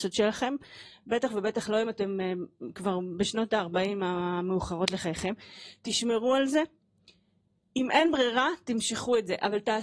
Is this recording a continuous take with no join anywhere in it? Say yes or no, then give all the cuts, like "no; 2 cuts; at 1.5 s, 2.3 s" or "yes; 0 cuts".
yes; 0 cuts